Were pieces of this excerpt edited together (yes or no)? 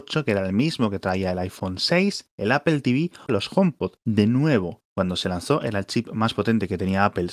yes